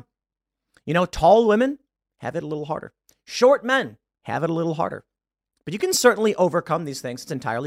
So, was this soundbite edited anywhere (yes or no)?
no